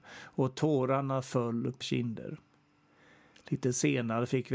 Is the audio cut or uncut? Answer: cut